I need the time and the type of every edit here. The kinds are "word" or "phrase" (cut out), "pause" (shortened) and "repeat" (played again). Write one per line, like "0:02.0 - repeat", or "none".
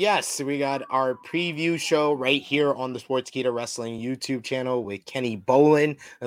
none